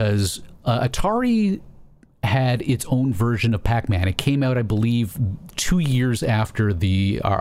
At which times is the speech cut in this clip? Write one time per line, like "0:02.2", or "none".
none